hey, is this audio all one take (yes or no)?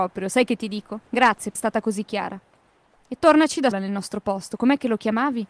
no